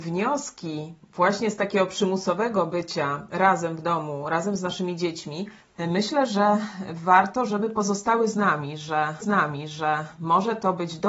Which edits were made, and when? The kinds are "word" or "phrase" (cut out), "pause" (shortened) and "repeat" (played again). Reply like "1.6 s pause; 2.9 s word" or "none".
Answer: 5.6 s pause; 9.2 s repeat

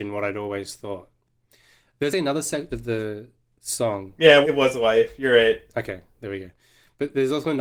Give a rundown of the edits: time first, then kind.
2.1 s word; 2.7 s word; 4.4 s word

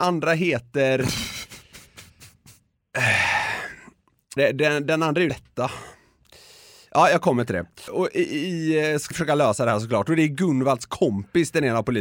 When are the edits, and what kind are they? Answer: 4.4 s word; 5.3 s word; 9.1 s word

